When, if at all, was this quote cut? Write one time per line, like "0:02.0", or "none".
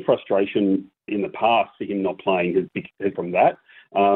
0:01.1
0:03.1

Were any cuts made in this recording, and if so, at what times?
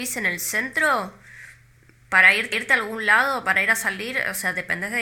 0:02.5

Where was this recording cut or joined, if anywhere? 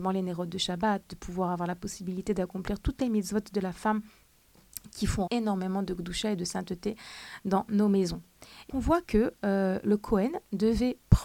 0:05.3
0:08.7

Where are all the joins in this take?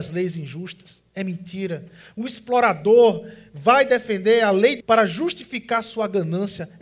0:04.8

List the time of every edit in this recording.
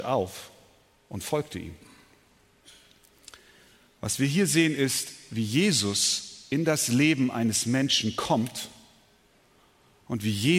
none

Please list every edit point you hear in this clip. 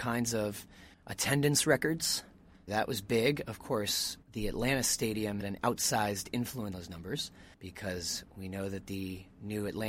0:00.9
0:02.7
0:04.2
0:05.4
0:06.7
0:07.5

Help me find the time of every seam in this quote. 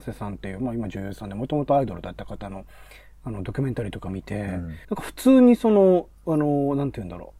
0:04.8

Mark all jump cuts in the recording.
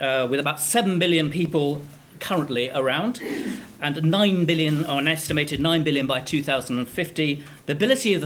none

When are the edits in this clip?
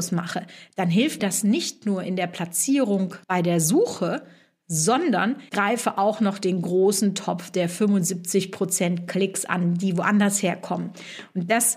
0:01.2
0:03.2
0:05.5

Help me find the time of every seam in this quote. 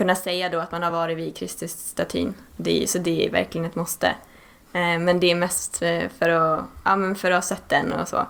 none

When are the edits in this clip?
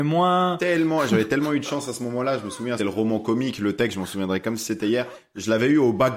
0:02.8

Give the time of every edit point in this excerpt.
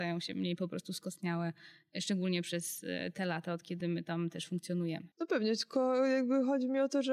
none

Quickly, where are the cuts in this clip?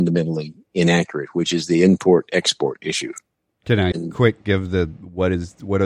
0:03.9

